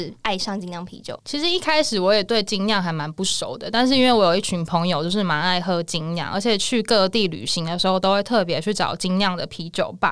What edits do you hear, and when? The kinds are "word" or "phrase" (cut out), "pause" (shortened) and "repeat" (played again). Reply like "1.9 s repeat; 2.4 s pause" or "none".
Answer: none